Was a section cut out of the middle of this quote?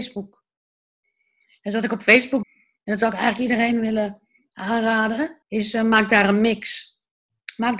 yes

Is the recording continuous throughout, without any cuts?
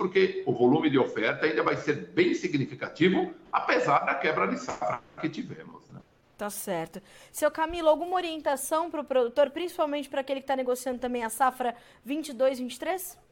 yes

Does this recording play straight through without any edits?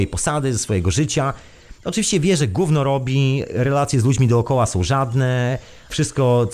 yes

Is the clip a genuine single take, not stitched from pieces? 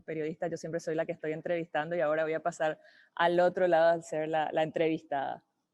yes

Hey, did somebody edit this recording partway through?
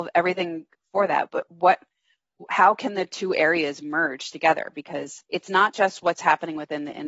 yes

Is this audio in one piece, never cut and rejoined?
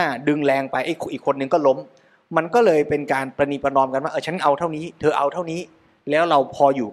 yes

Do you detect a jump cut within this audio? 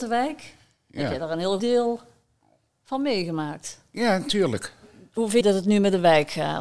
yes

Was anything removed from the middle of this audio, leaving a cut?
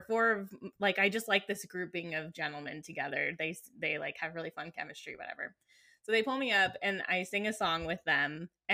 no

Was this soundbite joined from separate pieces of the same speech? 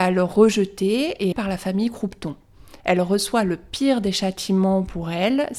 yes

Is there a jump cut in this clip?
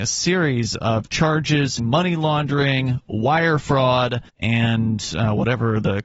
yes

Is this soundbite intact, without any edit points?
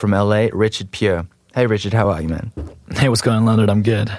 yes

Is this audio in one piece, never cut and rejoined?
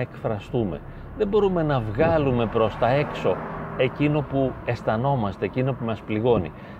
yes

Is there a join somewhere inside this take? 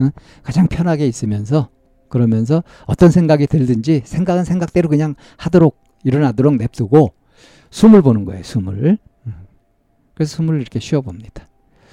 no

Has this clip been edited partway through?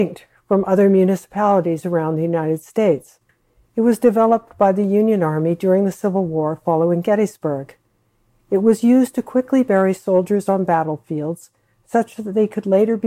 no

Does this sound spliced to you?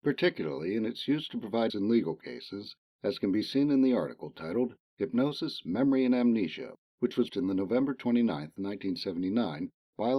yes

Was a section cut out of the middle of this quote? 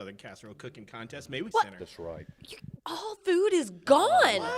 yes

